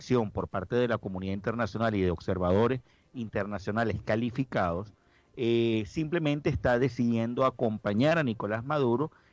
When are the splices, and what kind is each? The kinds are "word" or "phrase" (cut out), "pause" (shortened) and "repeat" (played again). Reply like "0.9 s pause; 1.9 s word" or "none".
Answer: none